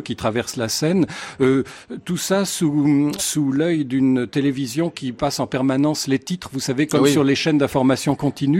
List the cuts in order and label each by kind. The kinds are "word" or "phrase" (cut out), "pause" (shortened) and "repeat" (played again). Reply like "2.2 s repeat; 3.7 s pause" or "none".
3.2 s word